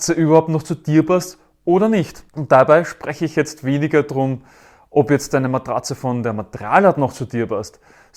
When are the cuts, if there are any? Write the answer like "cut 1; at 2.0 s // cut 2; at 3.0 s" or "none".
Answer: none